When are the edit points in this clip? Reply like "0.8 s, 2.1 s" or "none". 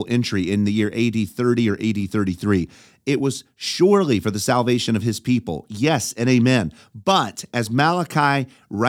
none